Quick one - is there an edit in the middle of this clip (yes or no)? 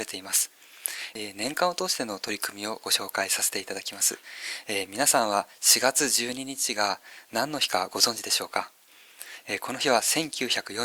no